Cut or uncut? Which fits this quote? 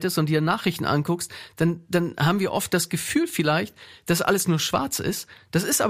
uncut